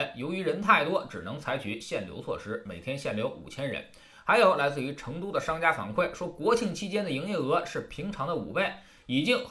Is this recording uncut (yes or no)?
yes